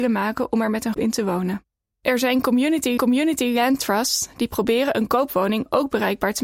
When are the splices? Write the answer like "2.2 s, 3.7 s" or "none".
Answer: 0.9 s, 1.8 s, 3.0 s